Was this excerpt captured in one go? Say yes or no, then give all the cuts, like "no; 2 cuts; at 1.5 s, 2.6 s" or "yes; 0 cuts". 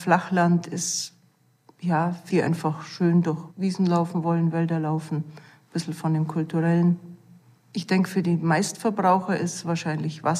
no; 2 cuts; at 2.3 s, 3.5 s